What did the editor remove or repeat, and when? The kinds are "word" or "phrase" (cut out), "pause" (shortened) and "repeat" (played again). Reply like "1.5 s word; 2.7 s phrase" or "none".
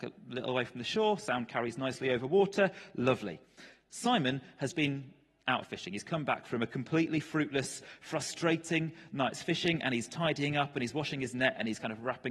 4.7 s word